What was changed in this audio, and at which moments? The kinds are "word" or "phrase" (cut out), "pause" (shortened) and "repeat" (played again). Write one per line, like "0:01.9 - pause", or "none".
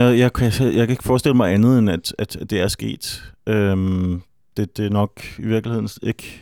none